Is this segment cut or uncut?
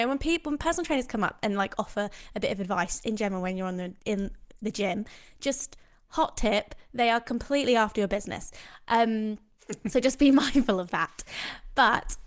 cut